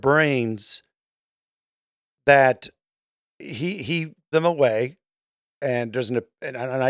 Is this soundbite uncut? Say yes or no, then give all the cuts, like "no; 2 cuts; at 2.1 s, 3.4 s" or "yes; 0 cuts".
no; 1 cut; at 4.3 s